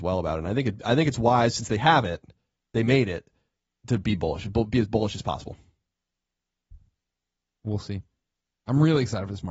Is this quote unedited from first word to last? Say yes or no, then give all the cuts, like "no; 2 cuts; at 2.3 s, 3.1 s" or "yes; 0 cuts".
yes; 0 cuts